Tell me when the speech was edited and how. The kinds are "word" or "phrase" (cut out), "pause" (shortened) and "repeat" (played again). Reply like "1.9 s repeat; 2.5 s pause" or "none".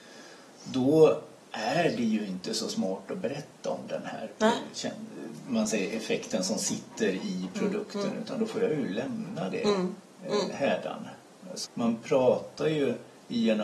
1.4 s pause; 11.6 s word